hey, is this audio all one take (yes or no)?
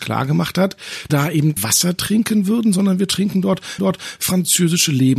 no